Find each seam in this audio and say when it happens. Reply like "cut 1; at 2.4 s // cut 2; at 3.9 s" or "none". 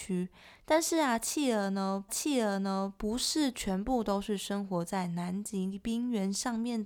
cut 1; at 2.1 s

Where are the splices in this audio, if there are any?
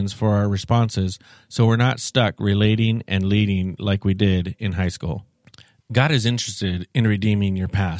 none

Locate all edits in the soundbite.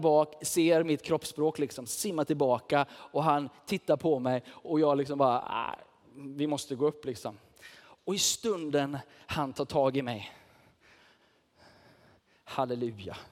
none

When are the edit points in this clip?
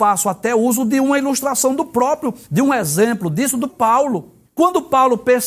cut 1; at 2.4 s // cut 2; at 3.7 s // cut 3; at 4.4 s

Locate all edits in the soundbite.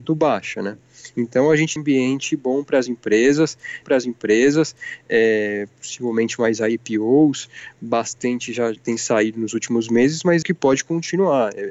cut 1; at 1.8 s // cut 2; at 3.8 s // cut 3; at 8.8 s // cut 4; at 10.4 s

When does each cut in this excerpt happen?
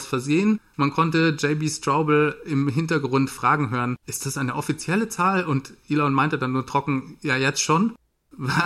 cut 1; at 4.0 s

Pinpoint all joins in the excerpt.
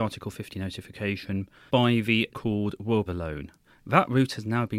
cut 1; at 1.7 s // cut 2; at 2.3 s // cut 3; at 3.1 s

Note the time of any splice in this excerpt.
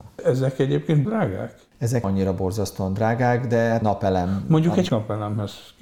cut 1; at 1.0 s // cut 2; at 2.0 s // cut 3; at 3.8 s // cut 4; at 4.9 s

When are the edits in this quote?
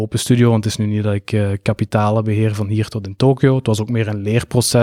none

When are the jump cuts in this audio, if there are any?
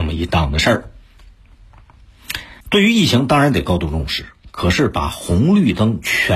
cut 1; at 2.6 s

